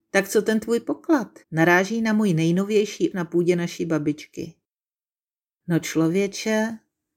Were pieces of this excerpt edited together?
yes; 2 cuts; at 1.4 s, 3.1 s

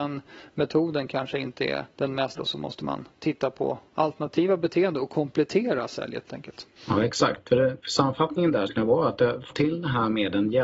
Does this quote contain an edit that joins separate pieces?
yes; 7 cuts; at 1.9 s, 2.4 s, 6.3 s, 6.8 s, 7.8 s, 8.7 s, 9.5 s

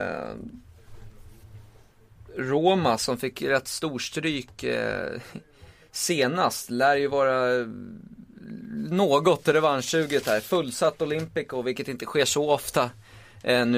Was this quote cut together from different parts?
no; 0 cuts

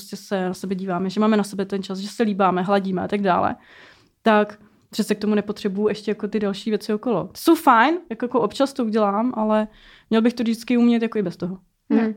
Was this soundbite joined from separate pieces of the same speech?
no; 0 cuts

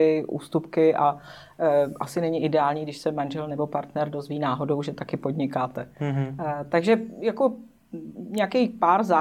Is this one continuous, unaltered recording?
yes; 0 cuts

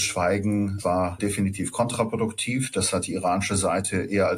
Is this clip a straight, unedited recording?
yes; 0 cuts

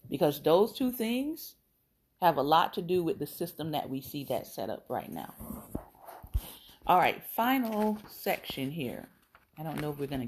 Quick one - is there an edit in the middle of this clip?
no; 0 cuts

